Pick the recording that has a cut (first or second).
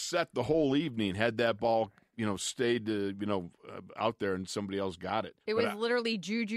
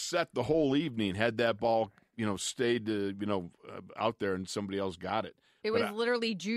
first